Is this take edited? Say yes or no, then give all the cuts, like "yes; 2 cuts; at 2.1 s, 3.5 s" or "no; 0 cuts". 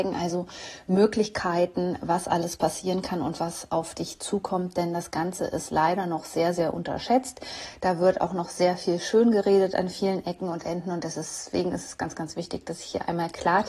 no; 0 cuts